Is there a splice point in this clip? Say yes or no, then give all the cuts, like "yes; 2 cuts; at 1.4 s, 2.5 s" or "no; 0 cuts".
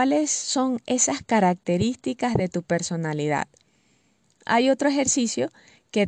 no; 0 cuts